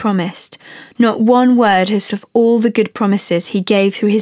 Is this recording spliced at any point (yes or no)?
yes